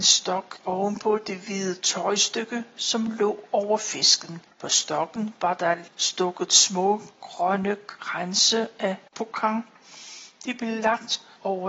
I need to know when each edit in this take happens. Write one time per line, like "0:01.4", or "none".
0:04.5